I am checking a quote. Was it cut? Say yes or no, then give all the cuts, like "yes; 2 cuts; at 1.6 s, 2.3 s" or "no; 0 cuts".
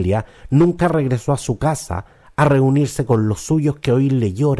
no; 0 cuts